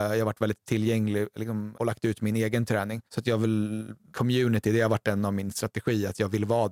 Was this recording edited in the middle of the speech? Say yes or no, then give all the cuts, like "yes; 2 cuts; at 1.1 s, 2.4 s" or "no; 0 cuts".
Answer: yes; 3 cuts; at 1.7 s, 3.1 s, 4.1 s